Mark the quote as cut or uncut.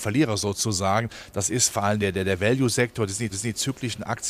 cut